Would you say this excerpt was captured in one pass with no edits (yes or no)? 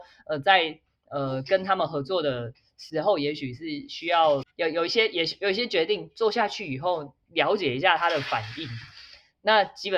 no